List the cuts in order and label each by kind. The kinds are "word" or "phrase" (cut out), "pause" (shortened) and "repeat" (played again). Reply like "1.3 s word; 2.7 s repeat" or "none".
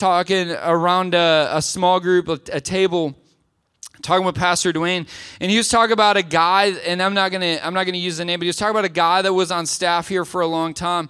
none

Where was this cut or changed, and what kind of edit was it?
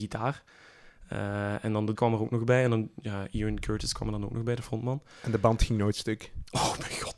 2.0 s word

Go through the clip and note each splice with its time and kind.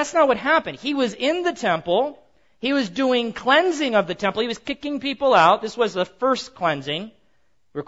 none

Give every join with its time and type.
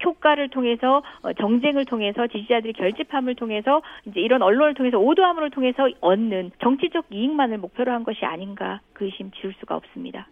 6.5 s pause

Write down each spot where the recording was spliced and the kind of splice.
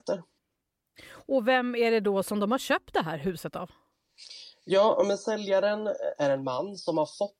none

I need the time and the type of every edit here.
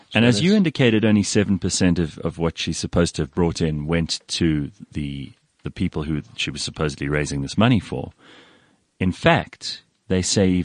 none

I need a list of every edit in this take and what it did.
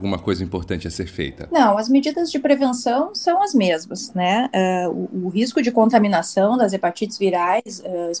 none

